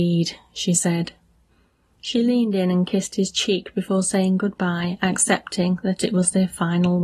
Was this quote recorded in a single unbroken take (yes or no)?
yes